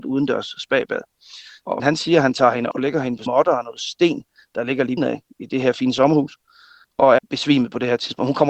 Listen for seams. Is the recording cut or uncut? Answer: cut